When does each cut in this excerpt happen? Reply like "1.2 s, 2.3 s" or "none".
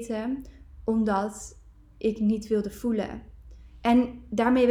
none

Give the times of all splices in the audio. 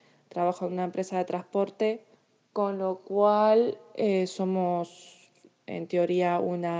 2.1 s

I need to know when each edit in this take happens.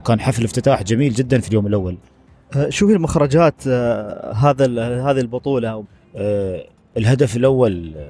none

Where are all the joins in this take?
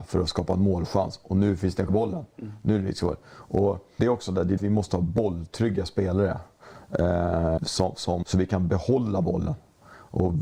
1.9 s, 4.0 s, 4.6 s, 4.9 s, 7.6 s, 8.2 s

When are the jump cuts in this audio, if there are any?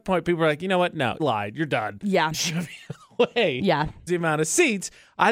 1.2 s, 2.3 s, 4.1 s

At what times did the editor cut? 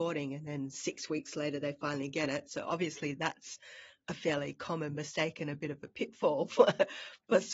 none

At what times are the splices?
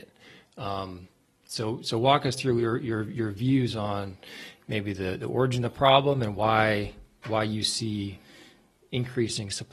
none

